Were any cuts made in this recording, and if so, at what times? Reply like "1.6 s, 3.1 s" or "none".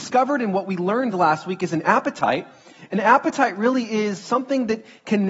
none